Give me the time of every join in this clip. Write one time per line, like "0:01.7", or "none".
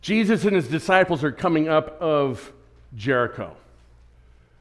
0:02.0